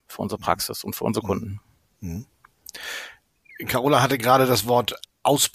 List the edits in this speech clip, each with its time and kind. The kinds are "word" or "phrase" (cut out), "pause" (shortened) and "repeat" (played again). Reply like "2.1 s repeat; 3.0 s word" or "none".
none